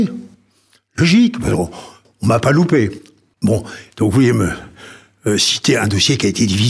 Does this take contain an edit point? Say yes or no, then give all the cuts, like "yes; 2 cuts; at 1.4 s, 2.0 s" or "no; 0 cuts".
no; 0 cuts